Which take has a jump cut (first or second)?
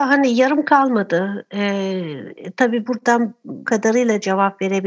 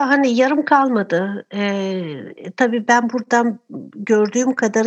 first